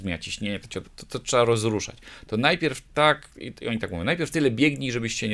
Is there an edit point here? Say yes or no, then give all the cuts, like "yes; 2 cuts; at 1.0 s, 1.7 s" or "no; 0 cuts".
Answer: no; 0 cuts